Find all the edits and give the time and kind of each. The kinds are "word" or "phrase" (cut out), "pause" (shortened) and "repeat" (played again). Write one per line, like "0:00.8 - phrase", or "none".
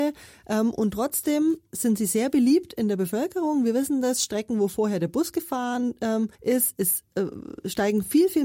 0:06.3 - pause